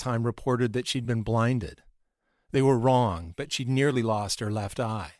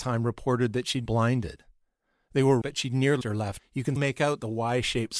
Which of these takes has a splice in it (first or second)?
second